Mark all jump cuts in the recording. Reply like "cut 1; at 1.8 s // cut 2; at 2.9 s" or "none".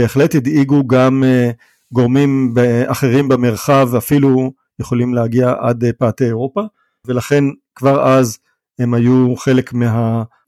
none